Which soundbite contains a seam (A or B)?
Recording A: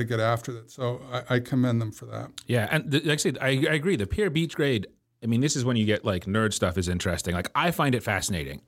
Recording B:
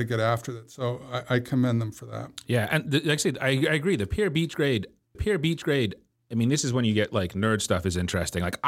B